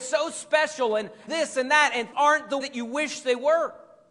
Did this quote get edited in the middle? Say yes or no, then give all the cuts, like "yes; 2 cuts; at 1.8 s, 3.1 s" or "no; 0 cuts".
yes; 3 cuts; at 1.3 s, 2.1 s, 2.6 s